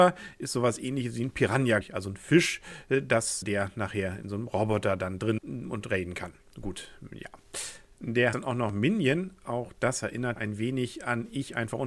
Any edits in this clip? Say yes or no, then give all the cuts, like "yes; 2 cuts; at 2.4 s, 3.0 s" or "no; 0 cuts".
yes; 5 cuts; at 1.8 s, 3.4 s, 5.4 s, 8.3 s, 10.4 s